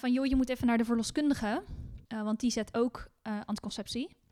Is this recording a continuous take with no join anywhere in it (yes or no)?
no